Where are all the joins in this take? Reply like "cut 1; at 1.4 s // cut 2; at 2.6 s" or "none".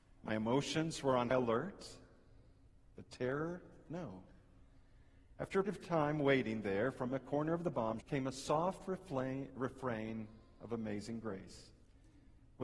cut 1; at 1.3 s // cut 2; at 5.7 s // cut 3; at 8.0 s